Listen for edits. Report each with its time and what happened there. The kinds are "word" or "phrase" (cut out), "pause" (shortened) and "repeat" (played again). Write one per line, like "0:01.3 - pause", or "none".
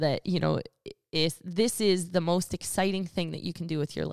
none